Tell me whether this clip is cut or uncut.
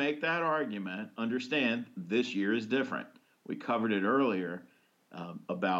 uncut